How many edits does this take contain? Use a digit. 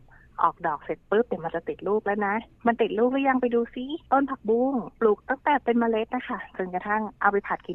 3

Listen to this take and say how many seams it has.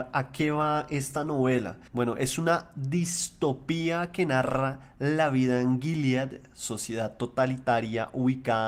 1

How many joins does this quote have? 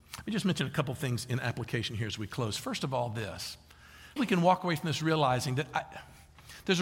1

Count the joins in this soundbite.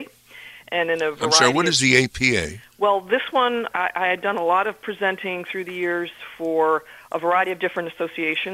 1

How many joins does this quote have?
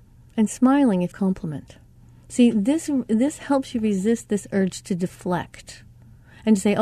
2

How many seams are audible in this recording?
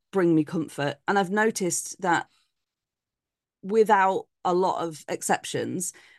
0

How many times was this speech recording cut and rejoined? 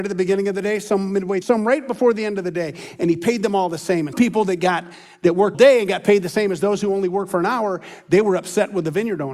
3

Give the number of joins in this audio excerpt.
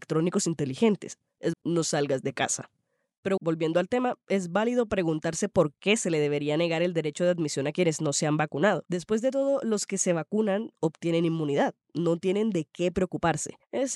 2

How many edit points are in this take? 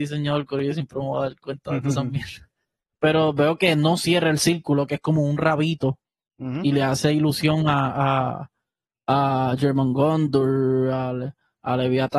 0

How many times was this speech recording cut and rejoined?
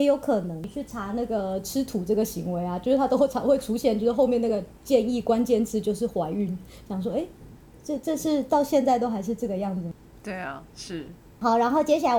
0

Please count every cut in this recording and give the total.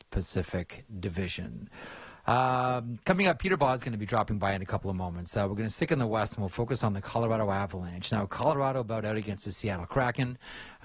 0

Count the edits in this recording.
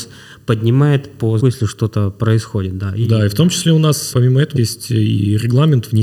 3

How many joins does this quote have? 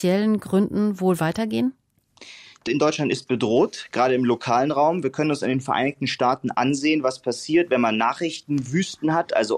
1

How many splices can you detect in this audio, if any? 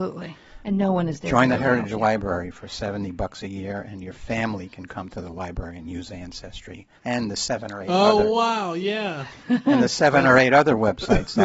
1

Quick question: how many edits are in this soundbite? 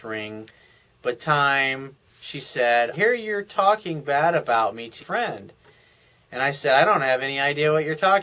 3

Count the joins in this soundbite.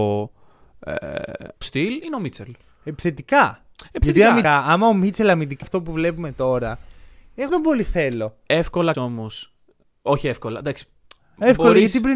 5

